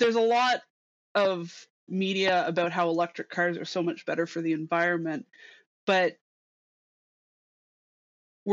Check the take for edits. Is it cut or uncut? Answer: uncut